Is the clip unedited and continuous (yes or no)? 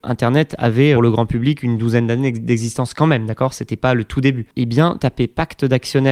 no